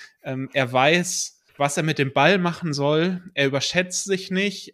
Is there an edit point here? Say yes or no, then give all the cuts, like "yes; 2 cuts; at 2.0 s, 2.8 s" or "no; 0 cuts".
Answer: yes; 1 cut; at 1.5 s